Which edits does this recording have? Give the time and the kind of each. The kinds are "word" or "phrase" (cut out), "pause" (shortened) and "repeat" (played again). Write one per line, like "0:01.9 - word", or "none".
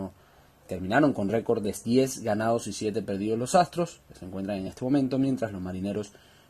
none